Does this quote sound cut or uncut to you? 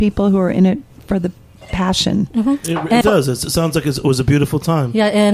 cut